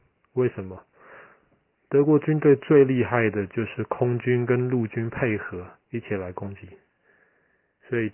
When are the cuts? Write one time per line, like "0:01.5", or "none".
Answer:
0:05.8